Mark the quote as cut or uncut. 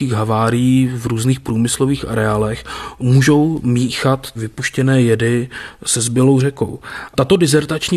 uncut